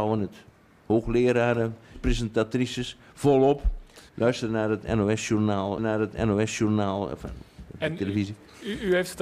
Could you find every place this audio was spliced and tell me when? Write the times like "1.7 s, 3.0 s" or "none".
1.9 s, 4.1 s, 5.8 s